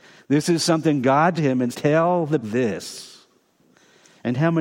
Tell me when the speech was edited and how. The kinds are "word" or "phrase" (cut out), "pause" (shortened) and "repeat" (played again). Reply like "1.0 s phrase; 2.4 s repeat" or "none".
1.4 s word; 1.7 s word; 2.4 s word